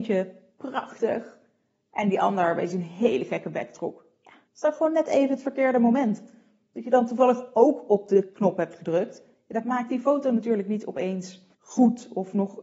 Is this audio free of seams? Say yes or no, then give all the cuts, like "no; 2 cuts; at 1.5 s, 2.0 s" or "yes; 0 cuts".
no; 2 cuts; at 4.5 s, 11.5 s